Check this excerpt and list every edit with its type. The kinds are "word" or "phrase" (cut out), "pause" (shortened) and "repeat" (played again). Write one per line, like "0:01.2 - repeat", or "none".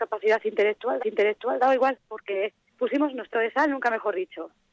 0:01.0 - repeat
0:02.7 - phrase
0:03.3 - word